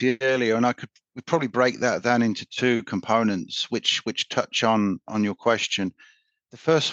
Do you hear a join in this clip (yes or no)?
no